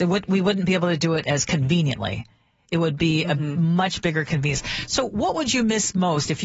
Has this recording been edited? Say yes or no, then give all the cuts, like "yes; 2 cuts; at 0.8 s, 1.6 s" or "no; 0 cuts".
no; 0 cuts